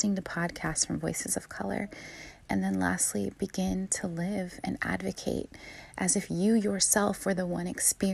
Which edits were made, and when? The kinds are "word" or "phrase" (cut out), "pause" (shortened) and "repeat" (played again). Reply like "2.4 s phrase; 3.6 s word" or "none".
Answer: none